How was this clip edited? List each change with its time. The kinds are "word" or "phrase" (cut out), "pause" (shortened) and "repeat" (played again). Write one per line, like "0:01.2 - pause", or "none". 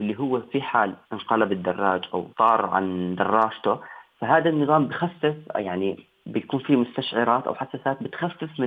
0:01.0 - pause
0:02.3 - pause